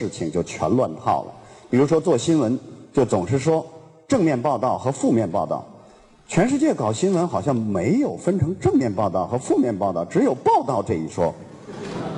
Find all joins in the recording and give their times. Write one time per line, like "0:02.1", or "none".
none